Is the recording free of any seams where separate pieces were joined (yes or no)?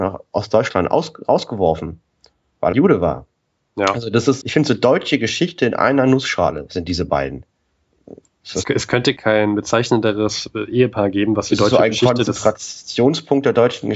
no